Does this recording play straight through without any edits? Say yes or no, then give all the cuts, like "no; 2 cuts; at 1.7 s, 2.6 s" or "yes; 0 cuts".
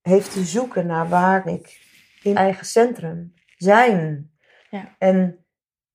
no; 2 cuts; at 1.4 s, 2.3 s